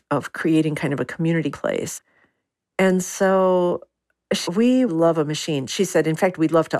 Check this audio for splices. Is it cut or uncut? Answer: cut